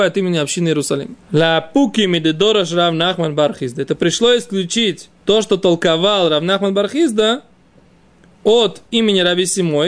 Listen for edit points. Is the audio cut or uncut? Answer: cut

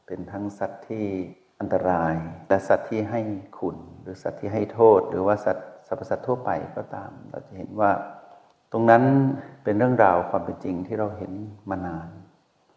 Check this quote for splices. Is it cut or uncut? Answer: uncut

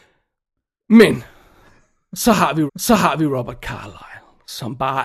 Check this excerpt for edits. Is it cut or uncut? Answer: cut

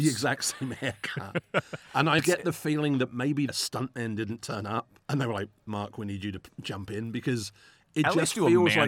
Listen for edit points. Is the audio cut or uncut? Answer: cut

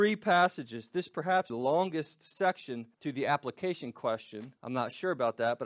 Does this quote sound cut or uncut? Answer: cut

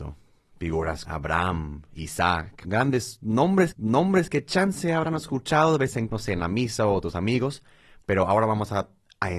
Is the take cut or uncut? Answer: cut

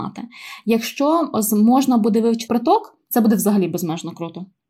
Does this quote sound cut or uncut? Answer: cut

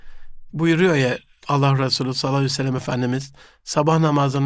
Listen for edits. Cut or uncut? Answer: uncut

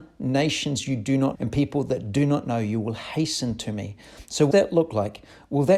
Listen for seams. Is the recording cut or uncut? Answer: cut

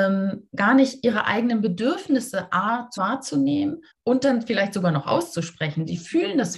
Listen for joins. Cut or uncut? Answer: cut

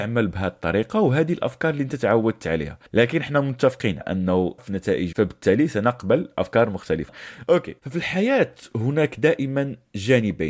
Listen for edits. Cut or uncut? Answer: cut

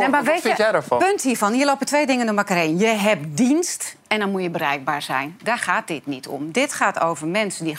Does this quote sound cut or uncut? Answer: uncut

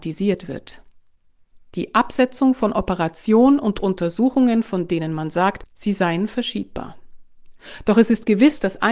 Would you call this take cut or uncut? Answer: uncut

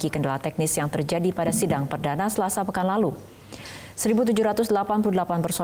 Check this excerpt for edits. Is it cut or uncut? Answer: uncut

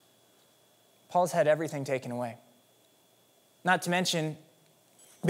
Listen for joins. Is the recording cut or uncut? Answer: uncut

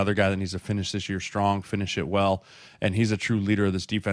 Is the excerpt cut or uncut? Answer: uncut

